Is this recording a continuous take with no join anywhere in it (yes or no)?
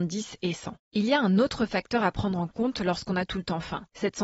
yes